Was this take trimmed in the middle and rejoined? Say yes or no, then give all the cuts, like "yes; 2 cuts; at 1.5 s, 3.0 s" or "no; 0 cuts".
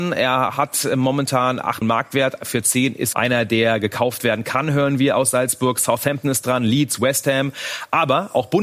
yes; 2 cuts; at 1.8 s, 3.1 s